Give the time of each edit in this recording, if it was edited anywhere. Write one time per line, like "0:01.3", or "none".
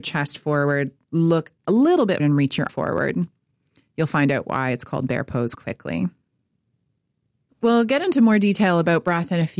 0:02.2
0:02.7
0:05.5